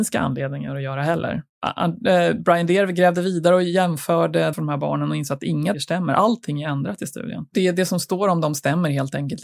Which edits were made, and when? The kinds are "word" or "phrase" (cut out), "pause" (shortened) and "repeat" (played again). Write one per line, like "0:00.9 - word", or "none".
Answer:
0:04.5 - phrase
0:05.7 - word